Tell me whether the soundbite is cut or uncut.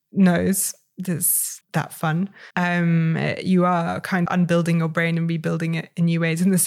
cut